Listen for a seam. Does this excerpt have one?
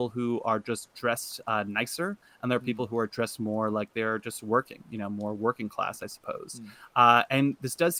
no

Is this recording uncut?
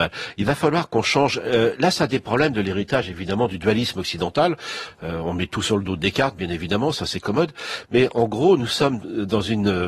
yes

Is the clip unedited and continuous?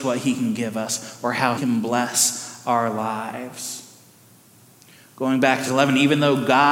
no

